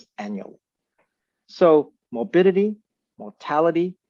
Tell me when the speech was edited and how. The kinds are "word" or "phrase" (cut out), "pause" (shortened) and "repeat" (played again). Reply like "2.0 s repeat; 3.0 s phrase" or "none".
none